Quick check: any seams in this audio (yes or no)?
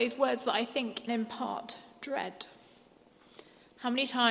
yes